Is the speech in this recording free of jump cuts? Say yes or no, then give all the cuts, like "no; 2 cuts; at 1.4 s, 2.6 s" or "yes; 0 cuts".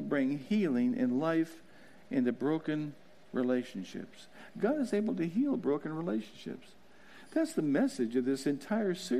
yes; 0 cuts